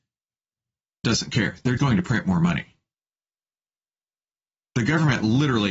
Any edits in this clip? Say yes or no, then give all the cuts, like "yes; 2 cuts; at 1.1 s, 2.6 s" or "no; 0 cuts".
yes; 2 cuts; at 1.0 s, 1.8 s